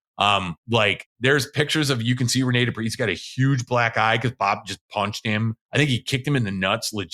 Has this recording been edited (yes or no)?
yes